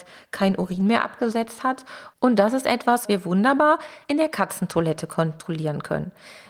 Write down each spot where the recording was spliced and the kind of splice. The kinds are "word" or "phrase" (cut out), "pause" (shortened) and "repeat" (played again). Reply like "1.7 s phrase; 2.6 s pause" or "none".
3.0 s word